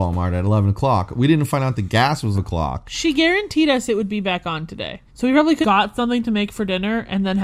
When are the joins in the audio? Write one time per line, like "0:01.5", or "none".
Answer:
0:02.3
0:05.1
0:05.6